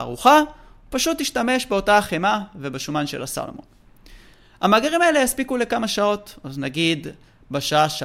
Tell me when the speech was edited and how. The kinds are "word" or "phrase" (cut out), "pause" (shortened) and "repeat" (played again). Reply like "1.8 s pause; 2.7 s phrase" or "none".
none